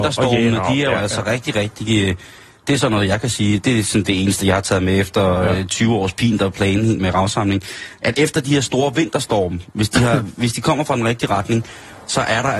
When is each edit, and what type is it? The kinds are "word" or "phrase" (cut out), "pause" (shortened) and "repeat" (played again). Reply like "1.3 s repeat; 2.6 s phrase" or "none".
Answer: 7.0 s word